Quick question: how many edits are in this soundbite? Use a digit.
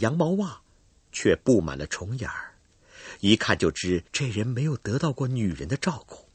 1